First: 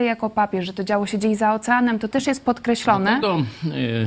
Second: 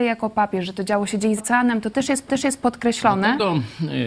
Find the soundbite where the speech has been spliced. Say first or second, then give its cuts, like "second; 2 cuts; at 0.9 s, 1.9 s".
second; 2 cuts; at 1.4 s, 2.3 s